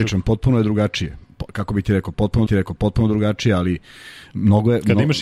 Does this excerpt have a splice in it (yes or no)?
yes